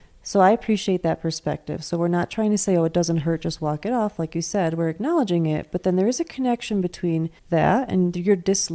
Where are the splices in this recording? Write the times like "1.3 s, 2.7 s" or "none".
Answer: 7.4 s